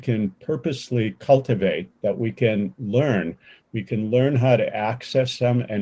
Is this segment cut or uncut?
uncut